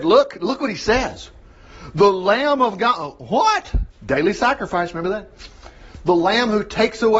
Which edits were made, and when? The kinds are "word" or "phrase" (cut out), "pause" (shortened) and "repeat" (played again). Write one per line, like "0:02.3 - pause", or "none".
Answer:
none